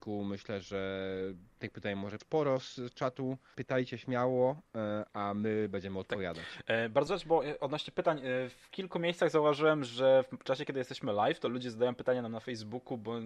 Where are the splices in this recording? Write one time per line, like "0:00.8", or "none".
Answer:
0:02.2
0:03.5
0:07.1